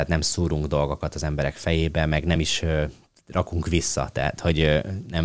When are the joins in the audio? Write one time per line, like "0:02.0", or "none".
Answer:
none